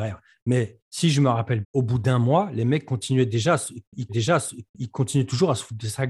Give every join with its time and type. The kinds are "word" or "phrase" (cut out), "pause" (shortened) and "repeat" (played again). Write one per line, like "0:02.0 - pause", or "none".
0:01.6 - word
0:04.1 - repeat